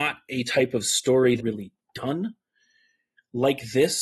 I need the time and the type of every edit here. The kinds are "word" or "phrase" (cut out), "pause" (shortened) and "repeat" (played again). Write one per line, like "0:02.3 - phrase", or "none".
0:01.4 - phrase